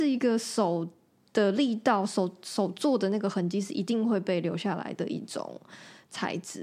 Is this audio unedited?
yes; 0 cuts

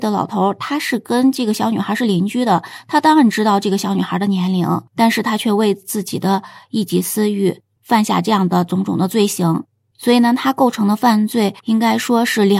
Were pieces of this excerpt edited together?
yes; 2 cuts; at 4.9 s, 11.6 s

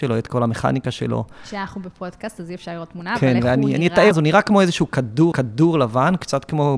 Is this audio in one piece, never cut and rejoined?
no; 2 cuts; at 4.1 s, 5.3 s

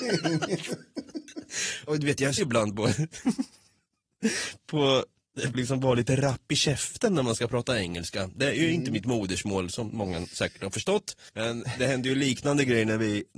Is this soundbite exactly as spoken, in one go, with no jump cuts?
no; 3 cuts; at 2.4 s, 5.5 s, 11.3 s

